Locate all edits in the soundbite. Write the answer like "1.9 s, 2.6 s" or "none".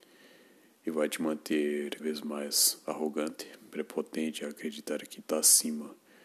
2.0 s, 3.7 s, 5.2 s